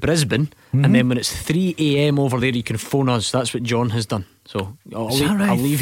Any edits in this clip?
no; 0 cuts

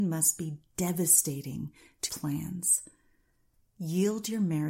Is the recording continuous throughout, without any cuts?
no; 1 cut; at 2.1 s

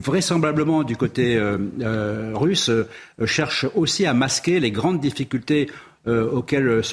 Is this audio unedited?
yes; 0 cuts

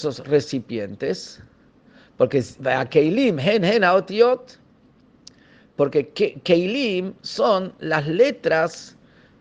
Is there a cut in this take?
no; 0 cuts

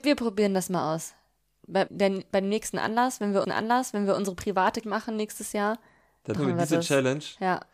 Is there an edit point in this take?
yes; 4 cuts; at 1.9 s, 3.4 s, 4.8 s, 6.4 s

